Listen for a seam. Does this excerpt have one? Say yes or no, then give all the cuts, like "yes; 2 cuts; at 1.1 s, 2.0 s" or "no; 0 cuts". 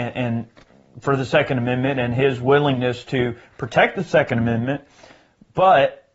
no; 0 cuts